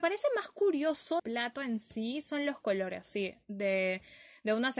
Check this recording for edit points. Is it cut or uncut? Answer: cut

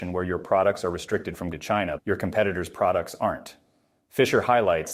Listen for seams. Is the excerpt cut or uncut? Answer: cut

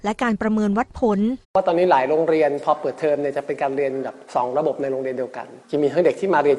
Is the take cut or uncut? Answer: cut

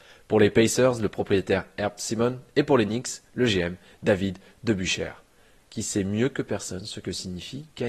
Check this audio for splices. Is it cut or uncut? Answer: uncut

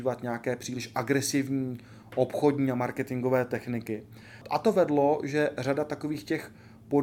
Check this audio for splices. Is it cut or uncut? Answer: uncut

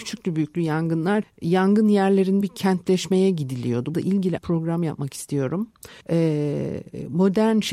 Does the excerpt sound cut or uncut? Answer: cut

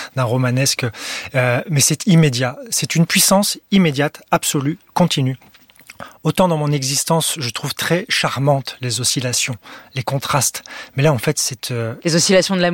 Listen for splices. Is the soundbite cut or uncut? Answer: uncut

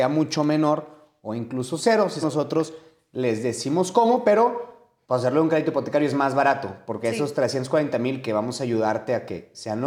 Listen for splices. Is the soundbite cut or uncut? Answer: cut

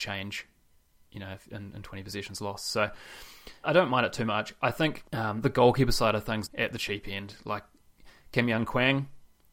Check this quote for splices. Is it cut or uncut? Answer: cut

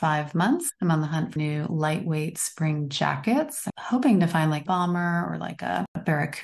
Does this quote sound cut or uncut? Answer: cut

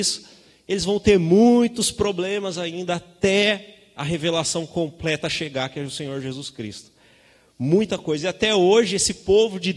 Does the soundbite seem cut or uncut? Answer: uncut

